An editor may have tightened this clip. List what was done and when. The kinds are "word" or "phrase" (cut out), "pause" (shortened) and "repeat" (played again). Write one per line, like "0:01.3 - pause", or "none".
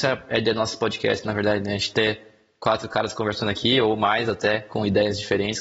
none